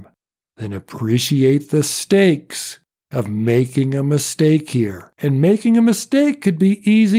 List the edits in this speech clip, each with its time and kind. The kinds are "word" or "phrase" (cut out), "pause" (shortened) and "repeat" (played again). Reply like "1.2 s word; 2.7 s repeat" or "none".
none